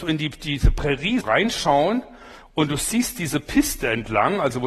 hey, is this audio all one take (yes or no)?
no